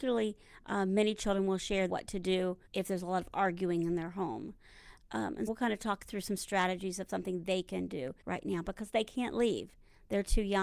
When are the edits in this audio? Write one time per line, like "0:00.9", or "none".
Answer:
0:01.9
0:02.7
0:05.5
0:08.2

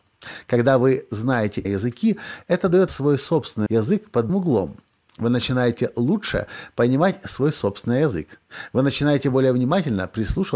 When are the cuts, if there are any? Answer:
0:01.6
0:02.9
0:03.7
0:04.3

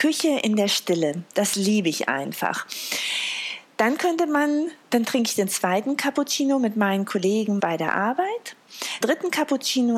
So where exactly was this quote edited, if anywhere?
0:07.6
0:09.0

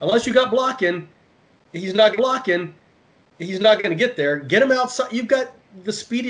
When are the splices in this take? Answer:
0:02.2

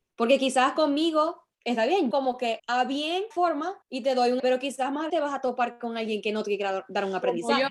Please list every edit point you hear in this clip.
0:01.5
0:02.1
0:02.6
0:03.3
0:03.8
0:04.4
0:05.1

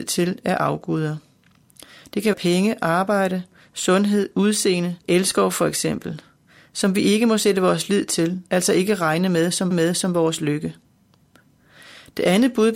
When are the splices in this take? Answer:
0:02.3
0:05.0
0:08.5
0:09.7

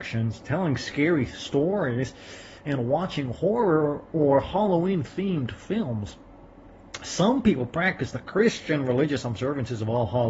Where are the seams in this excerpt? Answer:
none

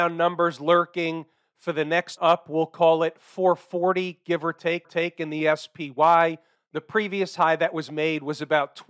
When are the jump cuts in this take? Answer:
0:02.2
0:04.8

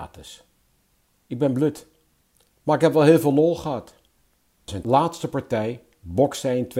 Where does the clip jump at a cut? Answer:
none

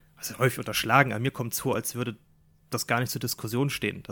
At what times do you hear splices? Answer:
none

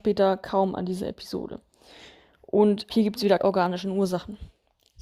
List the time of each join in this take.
0:02.9
0:03.4

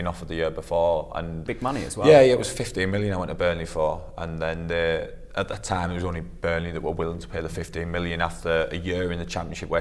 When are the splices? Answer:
0:01.5

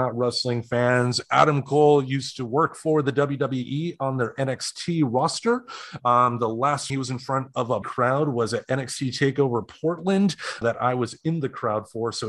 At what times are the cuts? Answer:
0:06.9
0:07.8
0:10.6

